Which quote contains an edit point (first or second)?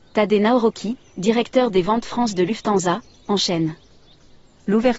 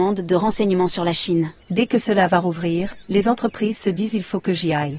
second